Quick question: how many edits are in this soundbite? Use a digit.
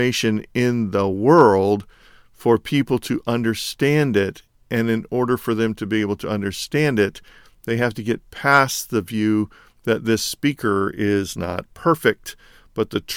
0